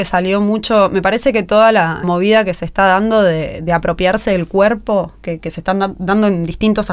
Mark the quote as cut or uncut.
cut